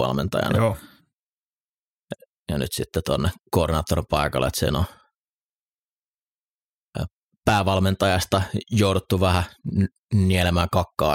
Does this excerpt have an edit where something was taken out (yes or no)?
no